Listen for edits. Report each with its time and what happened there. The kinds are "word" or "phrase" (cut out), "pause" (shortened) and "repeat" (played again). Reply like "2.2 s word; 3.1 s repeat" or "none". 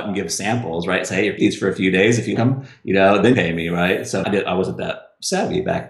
1.4 s word; 2.4 s word; 3.3 s word; 4.2 s word